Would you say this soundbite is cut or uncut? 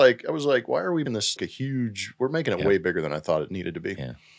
cut